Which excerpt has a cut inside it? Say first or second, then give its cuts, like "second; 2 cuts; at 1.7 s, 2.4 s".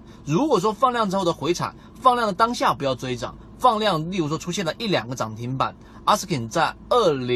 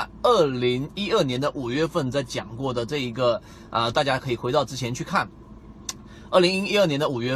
second; 1 cut; at 3.9 s